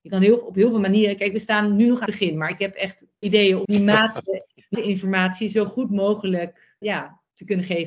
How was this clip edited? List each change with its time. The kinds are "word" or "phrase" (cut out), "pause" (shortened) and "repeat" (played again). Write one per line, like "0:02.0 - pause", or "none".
0:02.1 - word
0:03.2 - word
0:03.6 - word
0:04.7 - word
0:06.8 - word